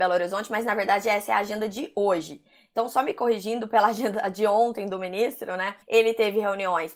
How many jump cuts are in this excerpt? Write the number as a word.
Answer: one